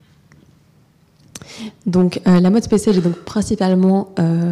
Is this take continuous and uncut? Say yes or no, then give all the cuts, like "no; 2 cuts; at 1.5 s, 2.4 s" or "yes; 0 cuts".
yes; 0 cuts